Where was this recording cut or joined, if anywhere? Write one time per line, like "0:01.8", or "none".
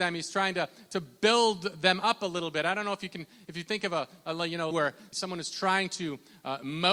0:04.7
0:05.1